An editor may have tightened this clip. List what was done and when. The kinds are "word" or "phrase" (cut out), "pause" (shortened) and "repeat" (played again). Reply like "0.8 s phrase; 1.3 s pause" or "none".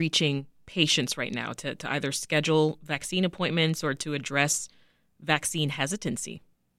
none